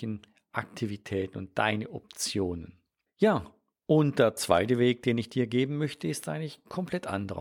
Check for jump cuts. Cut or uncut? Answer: cut